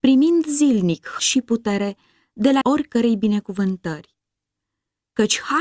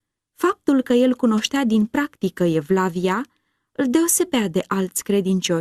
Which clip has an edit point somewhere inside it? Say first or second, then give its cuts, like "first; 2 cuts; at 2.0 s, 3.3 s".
first; 2 cuts; at 1.2 s, 2.6 s